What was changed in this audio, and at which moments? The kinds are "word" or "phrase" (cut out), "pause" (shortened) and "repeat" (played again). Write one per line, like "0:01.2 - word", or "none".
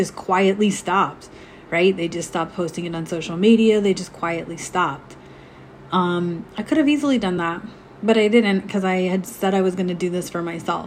none